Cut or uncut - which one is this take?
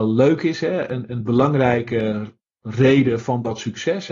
uncut